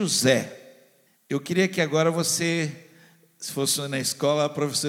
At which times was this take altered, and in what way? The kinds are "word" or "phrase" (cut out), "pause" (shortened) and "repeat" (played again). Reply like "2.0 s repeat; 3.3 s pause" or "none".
1.1 s pause